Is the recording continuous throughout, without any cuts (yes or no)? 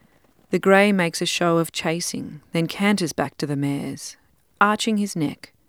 yes